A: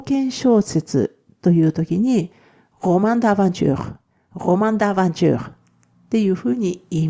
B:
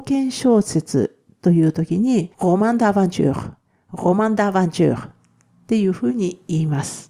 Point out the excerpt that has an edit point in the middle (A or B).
B